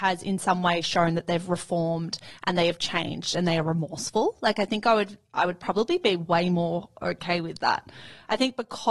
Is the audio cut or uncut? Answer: uncut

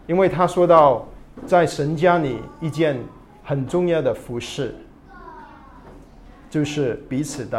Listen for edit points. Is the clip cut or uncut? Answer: uncut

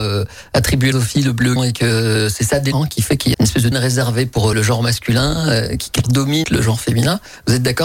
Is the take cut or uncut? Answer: cut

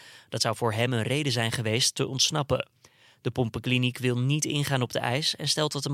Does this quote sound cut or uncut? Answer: uncut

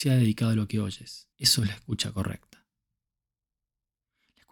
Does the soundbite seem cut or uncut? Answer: cut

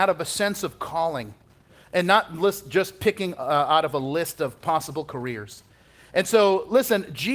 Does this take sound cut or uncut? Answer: uncut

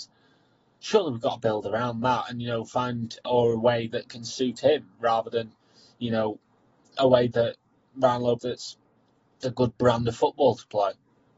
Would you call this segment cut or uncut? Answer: cut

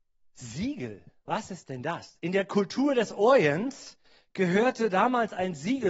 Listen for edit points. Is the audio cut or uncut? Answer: uncut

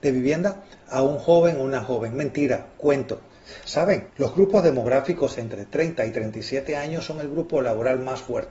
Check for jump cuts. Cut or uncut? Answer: cut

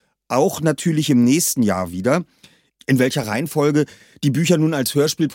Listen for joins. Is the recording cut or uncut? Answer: uncut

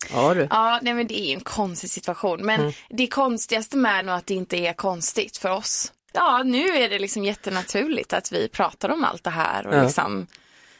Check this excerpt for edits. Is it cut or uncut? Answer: cut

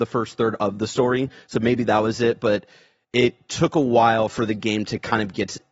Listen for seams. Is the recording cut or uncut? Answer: uncut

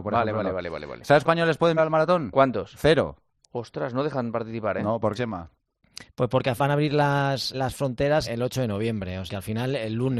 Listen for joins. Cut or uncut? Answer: cut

